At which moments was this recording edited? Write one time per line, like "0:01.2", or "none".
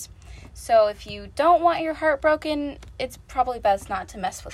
none